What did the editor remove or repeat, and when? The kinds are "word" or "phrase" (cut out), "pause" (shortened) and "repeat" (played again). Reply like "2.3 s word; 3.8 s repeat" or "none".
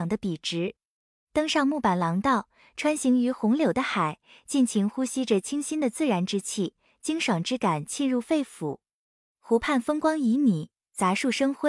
none